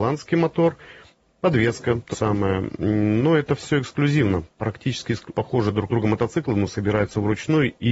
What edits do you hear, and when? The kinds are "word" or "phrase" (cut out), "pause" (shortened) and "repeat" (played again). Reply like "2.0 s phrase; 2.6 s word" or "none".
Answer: 2.1 s word; 5.3 s word; 5.9 s word

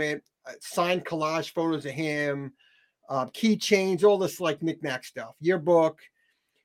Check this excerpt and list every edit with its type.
none

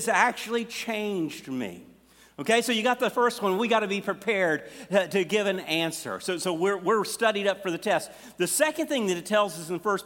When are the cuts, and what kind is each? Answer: none

